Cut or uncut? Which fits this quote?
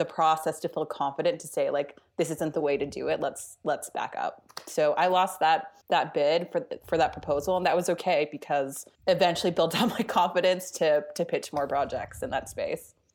cut